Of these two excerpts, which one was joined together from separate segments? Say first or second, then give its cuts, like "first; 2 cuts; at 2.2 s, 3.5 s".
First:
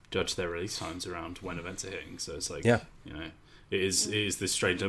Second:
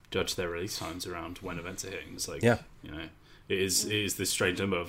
second; 1 cut; at 2.2 s